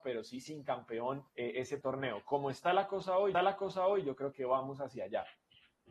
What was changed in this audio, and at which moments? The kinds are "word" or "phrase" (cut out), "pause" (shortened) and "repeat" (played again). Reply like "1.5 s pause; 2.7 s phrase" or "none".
1.3 s pause; 1.8 s word; 3.3 s repeat; 4.3 s word